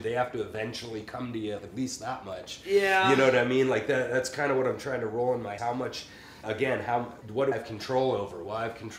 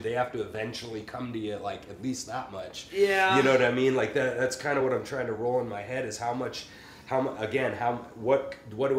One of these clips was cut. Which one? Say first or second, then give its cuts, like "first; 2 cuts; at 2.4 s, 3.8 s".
first; 5 cuts; at 1.6 s, 5.6 s, 6.4 s, 7.2 s, 7.5 s